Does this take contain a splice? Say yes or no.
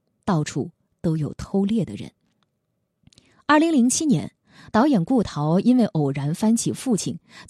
no